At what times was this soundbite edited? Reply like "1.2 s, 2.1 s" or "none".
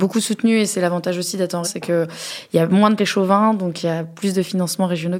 1.6 s, 3.0 s